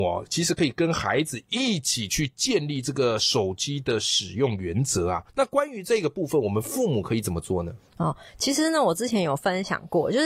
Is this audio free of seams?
no; 1 cut; at 5.3 s

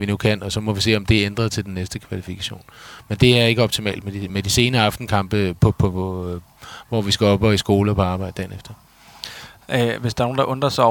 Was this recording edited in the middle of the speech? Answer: yes; 1 cut; at 4.3 s

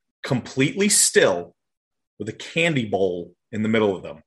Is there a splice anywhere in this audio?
no; 0 cuts

